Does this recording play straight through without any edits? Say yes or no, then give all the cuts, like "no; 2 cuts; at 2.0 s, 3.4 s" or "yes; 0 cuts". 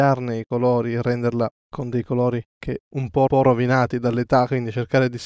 no; 2 cuts; at 2.8 s, 3.3 s